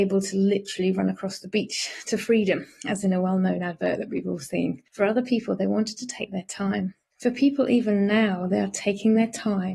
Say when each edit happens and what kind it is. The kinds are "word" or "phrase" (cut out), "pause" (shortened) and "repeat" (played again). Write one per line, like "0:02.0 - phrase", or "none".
none

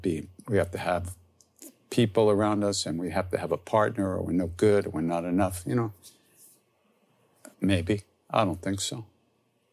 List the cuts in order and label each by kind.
0:07.5 - pause

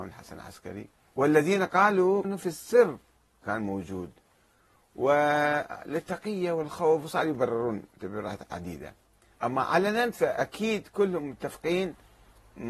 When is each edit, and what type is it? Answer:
0:01.1 - pause
0:02.2 - word

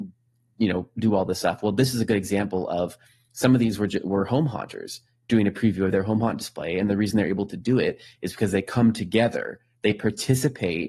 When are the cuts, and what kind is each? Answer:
none

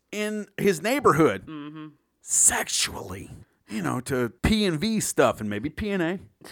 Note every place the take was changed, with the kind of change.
0:03.4 - pause
0:04.4 - pause

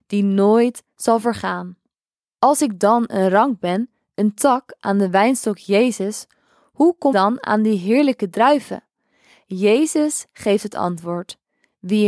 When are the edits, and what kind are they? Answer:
0:07.1 - word

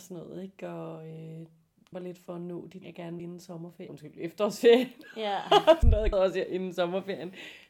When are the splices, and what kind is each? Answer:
0:01.9 - word
0:02.8 - word
0:03.2 - word
0:03.9 - word
0:05.8 - word
0:06.1 - word

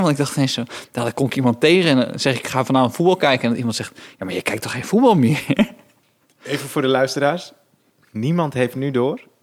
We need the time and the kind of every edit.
none

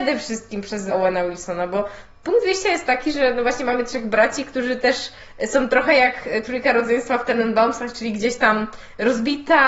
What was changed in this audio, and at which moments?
0:00.9 - word

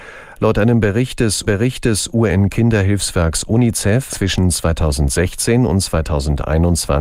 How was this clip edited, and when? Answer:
0:01.5 - repeat
0:04.1 - word

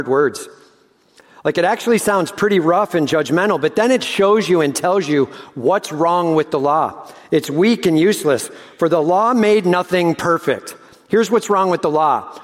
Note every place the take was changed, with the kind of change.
none

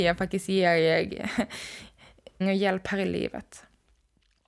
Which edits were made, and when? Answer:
0:02.4 - word

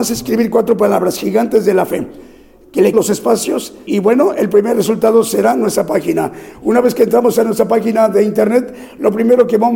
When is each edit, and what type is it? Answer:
0:02.9 - word
0:03.9 - word

